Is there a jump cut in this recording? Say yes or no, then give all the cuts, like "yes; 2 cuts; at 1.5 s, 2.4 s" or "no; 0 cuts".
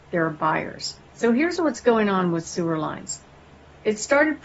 yes; 1 cut; at 1.1 s